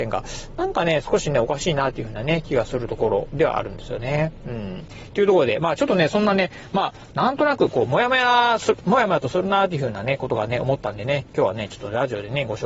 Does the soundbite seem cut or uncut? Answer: uncut